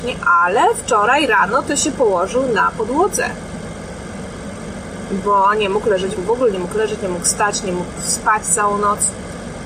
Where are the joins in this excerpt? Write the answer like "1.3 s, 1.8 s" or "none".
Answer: 6.2 s